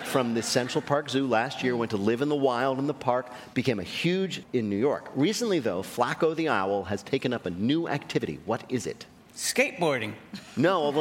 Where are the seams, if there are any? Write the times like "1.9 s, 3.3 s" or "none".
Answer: 4.4 s, 9.2 s